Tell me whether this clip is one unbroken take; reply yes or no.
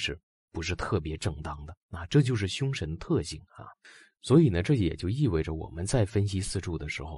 no